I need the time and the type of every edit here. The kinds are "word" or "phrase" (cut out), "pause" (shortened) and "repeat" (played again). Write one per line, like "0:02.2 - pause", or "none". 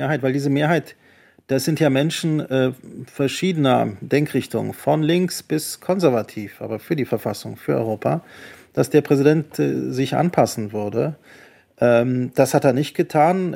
none